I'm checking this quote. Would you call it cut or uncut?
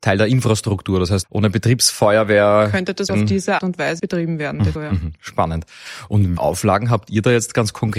cut